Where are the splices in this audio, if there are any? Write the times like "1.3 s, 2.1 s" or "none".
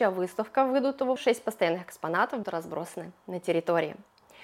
1.2 s, 2.4 s

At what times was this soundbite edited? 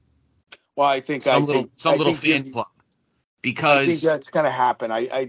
none

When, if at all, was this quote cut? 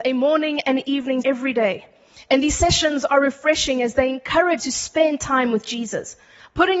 1.2 s, 4.6 s

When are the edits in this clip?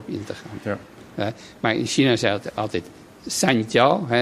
none

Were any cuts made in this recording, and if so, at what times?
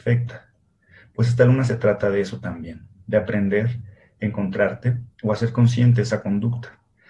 5.1 s

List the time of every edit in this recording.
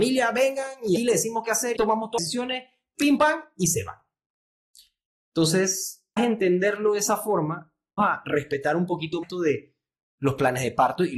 1.0 s, 1.8 s, 2.2 s, 3.2 s, 6.2 s, 8.0 s, 9.2 s

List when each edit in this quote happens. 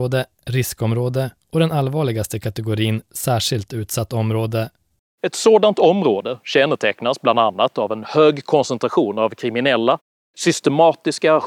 none

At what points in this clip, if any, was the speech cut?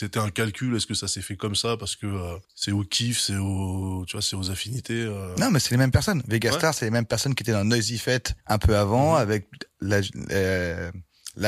2.4 s, 8.4 s

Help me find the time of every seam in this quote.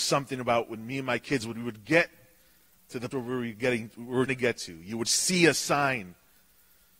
3.1 s, 4.3 s

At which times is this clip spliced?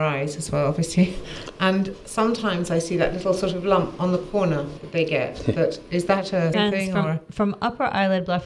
6.5 s

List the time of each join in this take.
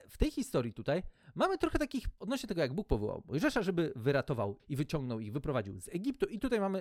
2.2 s, 4.6 s

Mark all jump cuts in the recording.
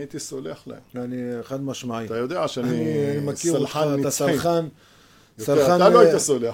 none

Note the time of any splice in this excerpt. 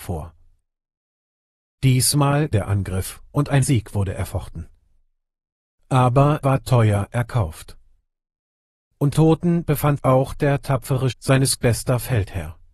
2.5 s, 3.6 s, 6.4 s, 9.1 s, 10.0 s, 11.1 s, 11.6 s

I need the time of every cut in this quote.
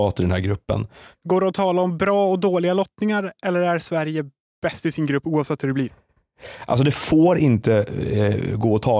none

